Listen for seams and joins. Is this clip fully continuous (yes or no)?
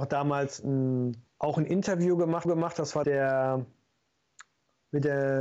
no